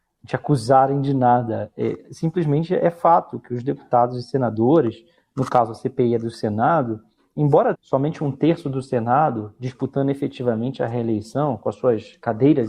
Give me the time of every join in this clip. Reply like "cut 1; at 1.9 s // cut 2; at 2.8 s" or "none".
cut 1; at 7.7 s